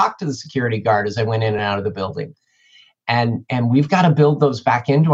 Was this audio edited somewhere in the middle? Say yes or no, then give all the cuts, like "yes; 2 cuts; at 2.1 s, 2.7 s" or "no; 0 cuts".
no; 0 cuts